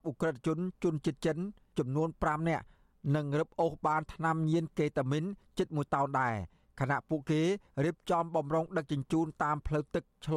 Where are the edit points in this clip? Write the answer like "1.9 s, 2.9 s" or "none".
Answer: none